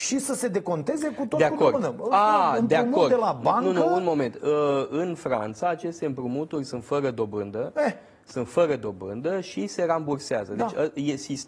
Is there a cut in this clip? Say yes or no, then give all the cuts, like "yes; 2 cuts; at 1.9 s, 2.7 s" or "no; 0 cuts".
no; 0 cuts